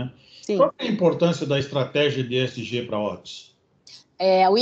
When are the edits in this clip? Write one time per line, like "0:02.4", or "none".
none